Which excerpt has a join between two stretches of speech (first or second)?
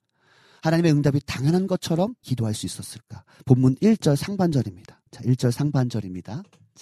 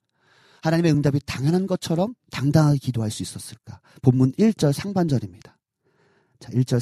first